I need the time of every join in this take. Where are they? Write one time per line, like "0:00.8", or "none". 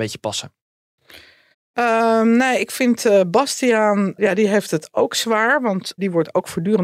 0:01.5